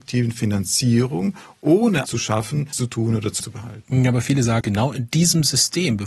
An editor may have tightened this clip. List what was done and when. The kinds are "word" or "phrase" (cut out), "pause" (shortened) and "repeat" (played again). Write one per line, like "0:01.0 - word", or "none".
0:02.1 - word
0:02.7 - word
0:03.4 - word
0:04.6 - word